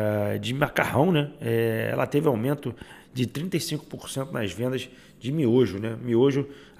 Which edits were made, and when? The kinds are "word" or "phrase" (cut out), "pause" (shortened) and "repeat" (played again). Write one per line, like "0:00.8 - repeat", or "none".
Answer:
none